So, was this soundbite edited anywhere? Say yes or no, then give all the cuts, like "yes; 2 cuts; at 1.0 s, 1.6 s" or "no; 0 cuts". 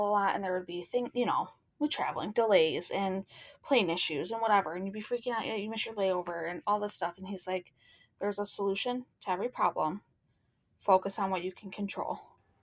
no; 0 cuts